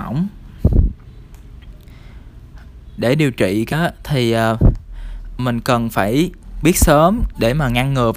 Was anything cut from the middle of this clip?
yes; 4 cuts; at 3.0 s, 3.7 s, 5.4 s, 6.6 s

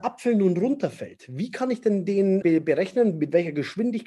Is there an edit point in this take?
yes; 1 cut; at 2.4 s

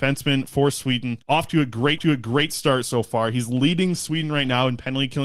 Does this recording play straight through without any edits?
no; 2 cuts; at 1.2 s, 2.0 s

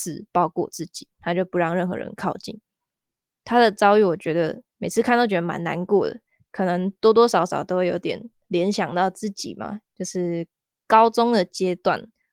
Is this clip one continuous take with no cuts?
no; 1 cut; at 4.7 s

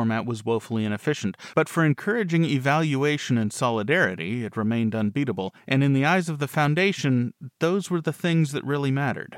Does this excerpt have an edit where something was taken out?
no; 0 cuts

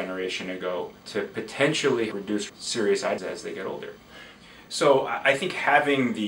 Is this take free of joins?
no; 4 cuts; at 1.0 s, 2.1 s, 2.5 s, 3.2 s

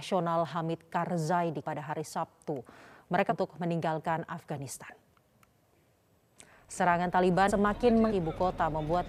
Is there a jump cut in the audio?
yes; 4 cuts; at 1.6 s, 3.3 s, 7.5 s, 8.1 s

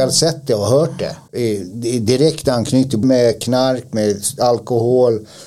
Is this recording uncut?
no; 2 cuts; at 1.3 s, 3.0 s

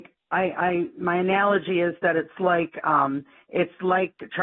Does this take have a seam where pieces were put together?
no; 0 cuts

